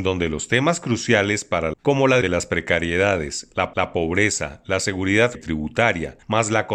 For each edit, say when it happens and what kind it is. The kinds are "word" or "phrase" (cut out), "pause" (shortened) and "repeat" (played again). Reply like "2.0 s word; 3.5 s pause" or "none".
1.7 s phrase; 2.2 s word; 3.7 s repeat; 5.3 s word